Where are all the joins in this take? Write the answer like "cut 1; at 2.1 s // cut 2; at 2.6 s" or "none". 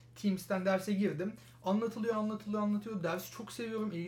cut 1; at 2.1 s